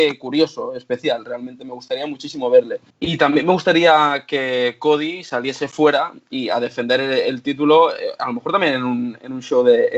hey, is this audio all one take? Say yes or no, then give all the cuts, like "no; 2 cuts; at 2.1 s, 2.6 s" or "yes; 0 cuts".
no; 1 cut; at 2.9 s